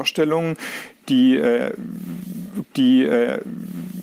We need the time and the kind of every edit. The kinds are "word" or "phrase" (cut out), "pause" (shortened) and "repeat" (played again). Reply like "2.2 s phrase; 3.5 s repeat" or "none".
2.6 s repeat